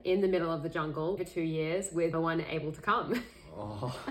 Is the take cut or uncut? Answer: cut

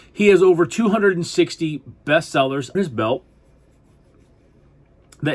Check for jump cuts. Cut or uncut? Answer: cut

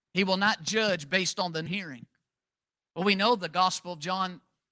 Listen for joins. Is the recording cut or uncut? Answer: cut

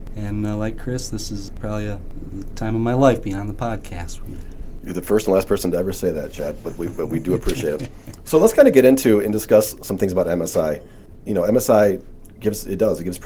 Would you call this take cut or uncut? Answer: uncut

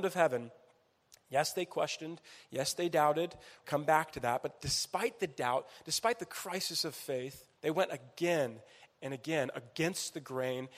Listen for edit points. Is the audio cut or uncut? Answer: cut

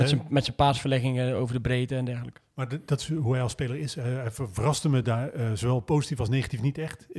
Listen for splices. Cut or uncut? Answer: uncut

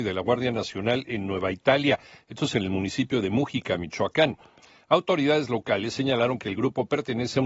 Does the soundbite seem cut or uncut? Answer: uncut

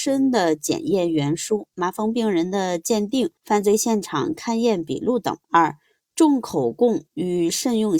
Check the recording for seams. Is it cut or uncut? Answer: cut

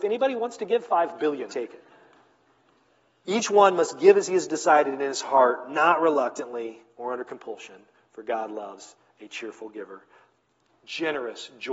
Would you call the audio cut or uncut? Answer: cut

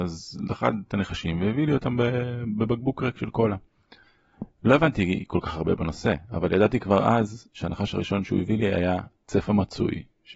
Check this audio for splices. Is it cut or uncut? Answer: uncut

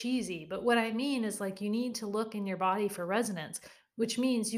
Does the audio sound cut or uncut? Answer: uncut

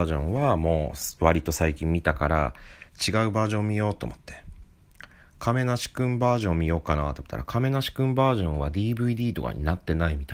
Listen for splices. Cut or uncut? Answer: uncut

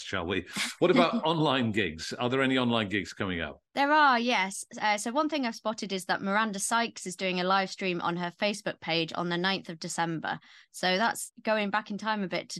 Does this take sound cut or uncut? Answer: uncut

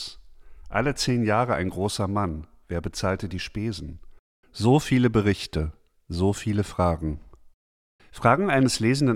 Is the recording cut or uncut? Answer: uncut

